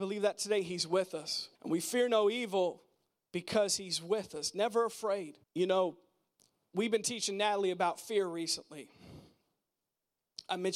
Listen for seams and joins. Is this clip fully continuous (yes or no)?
no